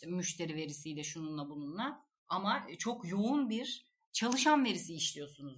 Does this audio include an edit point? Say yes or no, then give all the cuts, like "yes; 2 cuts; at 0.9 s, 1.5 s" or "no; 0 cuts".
no; 0 cuts